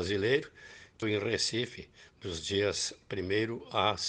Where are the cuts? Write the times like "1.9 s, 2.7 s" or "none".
1.0 s